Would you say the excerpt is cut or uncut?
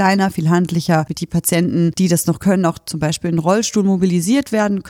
uncut